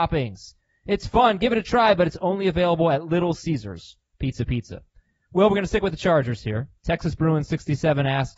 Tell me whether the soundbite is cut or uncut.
uncut